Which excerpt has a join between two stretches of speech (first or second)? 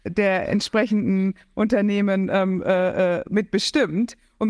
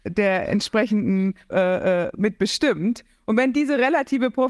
second